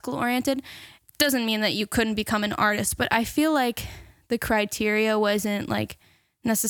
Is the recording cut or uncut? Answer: uncut